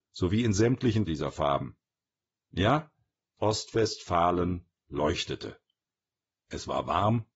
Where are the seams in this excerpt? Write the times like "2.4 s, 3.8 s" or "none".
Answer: 1.1 s, 3.4 s